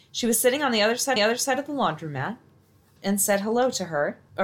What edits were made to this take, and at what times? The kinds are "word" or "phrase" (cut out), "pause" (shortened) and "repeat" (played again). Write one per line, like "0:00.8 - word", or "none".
0:01.2 - repeat
0:03.0 - phrase